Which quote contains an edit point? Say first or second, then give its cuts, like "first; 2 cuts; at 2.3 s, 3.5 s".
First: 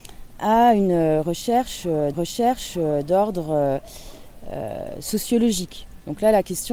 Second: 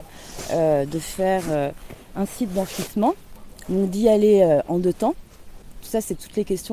first; 1 cut; at 2.1 s